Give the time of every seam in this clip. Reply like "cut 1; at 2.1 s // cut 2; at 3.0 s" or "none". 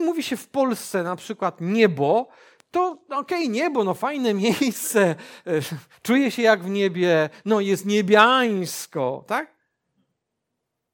none